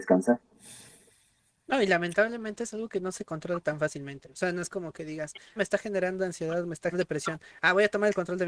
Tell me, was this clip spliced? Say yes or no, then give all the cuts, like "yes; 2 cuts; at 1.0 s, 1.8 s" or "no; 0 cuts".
yes; 2 cuts; at 5.6 s, 6.9 s